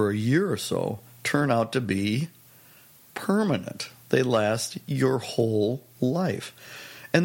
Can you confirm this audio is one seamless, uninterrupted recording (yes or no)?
yes